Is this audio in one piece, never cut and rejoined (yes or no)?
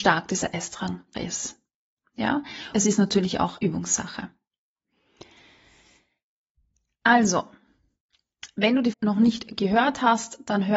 no